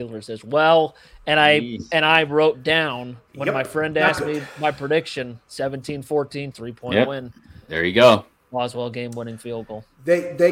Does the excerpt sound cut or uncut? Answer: cut